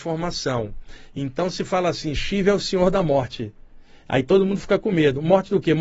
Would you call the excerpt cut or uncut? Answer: uncut